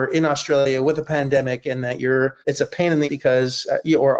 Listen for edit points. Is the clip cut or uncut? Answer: cut